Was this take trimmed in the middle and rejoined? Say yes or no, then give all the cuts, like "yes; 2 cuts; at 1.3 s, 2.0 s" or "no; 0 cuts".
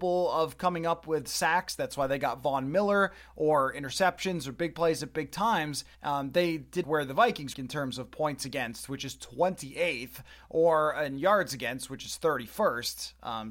yes; 3 cuts; at 5.9 s, 6.8 s, 7.5 s